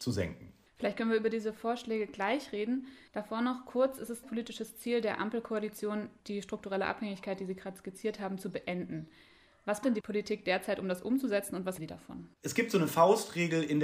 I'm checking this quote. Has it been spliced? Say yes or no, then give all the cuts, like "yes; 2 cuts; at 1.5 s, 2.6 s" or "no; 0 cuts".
yes; 6 cuts; at 3.1 s, 4.2 s, 6.2 s, 9.8 s, 11.8 s, 12.3 s